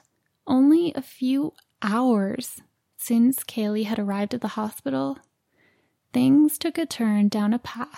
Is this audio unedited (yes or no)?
yes